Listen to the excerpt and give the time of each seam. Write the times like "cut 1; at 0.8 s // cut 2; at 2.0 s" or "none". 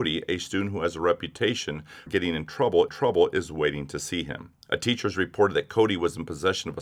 cut 1; at 2.1 s // cut 2; at 2.9 s // cut 3; at 4.6 s